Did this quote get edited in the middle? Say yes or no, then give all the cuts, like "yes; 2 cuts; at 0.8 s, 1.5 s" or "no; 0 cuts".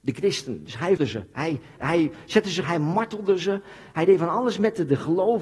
yes; 3 cuts; at 1.0 s, 1.8 s, 2.6 s